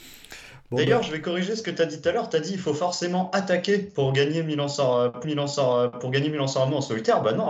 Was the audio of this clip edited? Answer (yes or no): yes